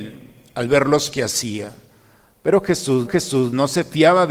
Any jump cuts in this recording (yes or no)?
yes